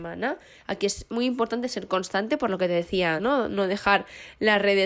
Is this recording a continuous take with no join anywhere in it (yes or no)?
no